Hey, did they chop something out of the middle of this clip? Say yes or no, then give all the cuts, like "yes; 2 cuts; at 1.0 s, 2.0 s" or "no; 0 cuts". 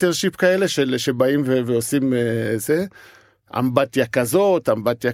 no; 0 cuts